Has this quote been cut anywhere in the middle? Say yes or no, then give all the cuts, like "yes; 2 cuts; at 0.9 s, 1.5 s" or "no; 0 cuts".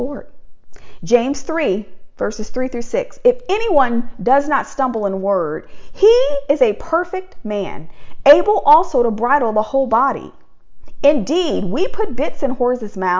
no; 0 cuts